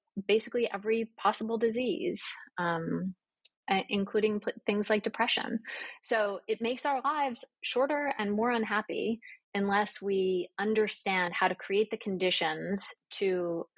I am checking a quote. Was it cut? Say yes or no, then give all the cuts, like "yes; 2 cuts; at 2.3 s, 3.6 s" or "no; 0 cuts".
no; 0 cuts